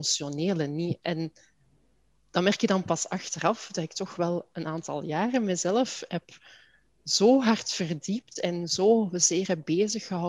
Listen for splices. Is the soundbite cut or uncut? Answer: uncut